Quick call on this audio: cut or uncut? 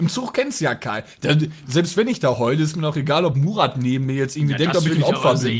uncut